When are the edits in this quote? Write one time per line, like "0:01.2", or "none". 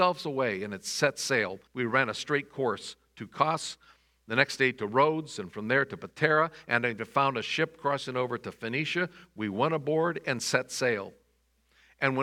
0:01.7